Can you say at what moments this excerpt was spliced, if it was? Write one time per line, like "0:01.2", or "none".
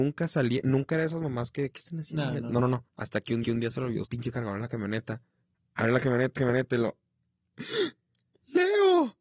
0:01.7
0:02.9
0:03.4
0:04.0
0:05.4
0:06.4